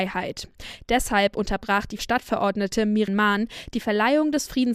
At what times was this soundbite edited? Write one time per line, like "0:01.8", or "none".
0:02.0
0:03.1